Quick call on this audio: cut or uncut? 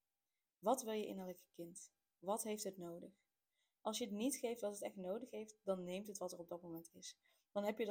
uncut